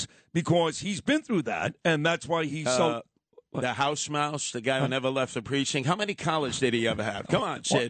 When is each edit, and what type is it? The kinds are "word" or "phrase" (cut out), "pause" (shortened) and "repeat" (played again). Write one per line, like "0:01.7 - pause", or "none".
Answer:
none